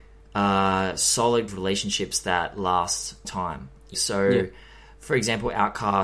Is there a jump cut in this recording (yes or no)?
yes